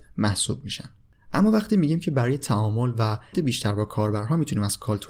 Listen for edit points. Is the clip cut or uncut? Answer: cut